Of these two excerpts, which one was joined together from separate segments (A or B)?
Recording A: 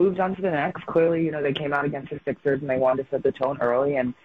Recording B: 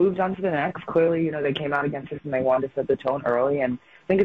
B